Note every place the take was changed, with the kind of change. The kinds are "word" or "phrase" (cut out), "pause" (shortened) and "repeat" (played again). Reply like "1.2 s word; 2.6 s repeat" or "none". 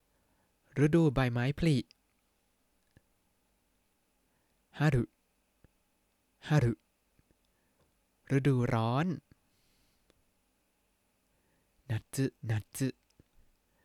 12.4 s pause